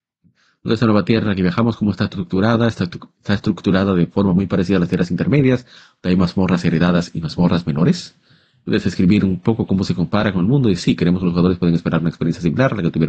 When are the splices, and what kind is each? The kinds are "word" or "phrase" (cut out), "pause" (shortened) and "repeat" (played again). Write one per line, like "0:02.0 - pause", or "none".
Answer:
none